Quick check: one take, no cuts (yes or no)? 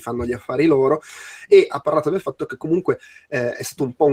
yes